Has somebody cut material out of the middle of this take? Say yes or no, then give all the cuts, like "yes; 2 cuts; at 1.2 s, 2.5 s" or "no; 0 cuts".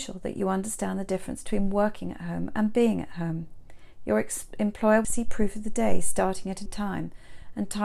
yes; 2 cuts; at 5.0 s, 6.7 s